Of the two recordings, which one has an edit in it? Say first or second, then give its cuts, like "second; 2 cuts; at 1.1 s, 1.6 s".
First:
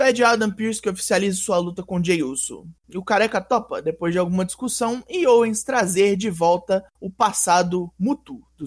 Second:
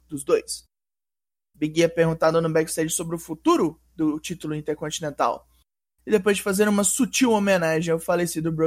first; 1 cut; at 6.9 s